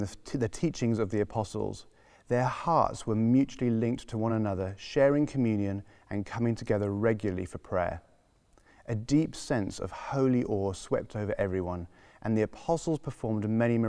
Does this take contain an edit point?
no; 0 cuts

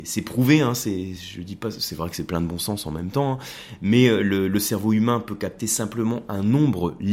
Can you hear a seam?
no; 0 cuts

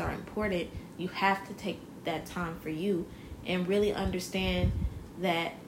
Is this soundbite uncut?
yes; 0 cuts

